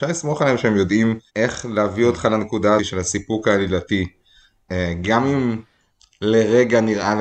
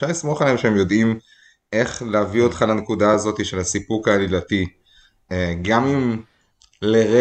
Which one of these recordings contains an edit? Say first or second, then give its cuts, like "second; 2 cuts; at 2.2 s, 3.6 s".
first; 2 cuts; at 1.3 s, 2.8 s